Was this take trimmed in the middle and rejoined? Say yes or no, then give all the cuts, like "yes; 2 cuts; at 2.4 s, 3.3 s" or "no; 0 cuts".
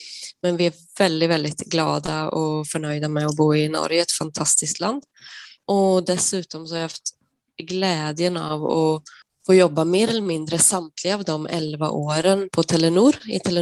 yes; 1 cut; at 12.5 s